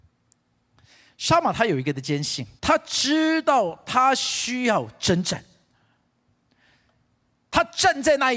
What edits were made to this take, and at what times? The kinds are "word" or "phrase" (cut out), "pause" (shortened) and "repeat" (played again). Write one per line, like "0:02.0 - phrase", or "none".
0:02.6 - pause